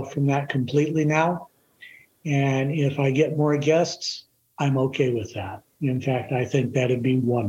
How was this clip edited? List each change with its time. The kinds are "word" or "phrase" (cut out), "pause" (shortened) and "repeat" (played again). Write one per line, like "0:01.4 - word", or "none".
none